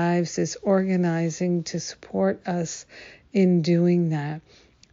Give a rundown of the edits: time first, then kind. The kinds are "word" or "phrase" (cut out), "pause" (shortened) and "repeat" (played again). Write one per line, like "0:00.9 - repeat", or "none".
none